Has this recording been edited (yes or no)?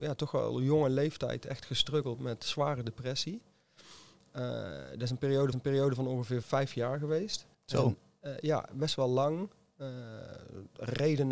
yes